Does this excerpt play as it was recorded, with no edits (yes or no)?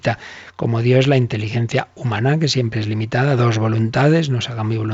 yes